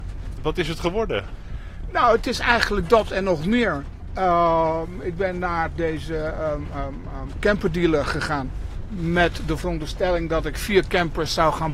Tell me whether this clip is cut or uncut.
uncut